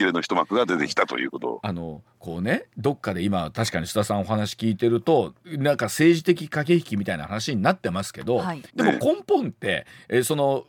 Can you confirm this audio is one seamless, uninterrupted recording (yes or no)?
no